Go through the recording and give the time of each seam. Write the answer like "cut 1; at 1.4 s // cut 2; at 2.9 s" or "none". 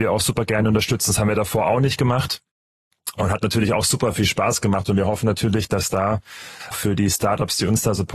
cut 1; at 6.7 s